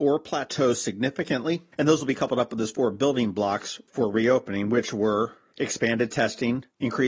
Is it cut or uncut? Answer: uncut